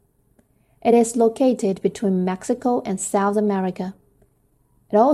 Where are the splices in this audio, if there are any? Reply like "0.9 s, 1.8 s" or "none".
none